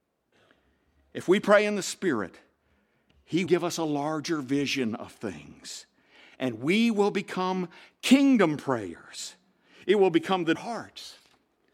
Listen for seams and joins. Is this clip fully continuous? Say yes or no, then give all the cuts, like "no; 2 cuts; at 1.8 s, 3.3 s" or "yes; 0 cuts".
no; 2 cuts; at 3.5 s, 10.5 s